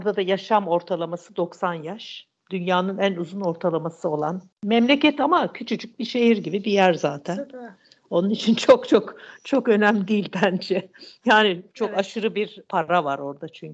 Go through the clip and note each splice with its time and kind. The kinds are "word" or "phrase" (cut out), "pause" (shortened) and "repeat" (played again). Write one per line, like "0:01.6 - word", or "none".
none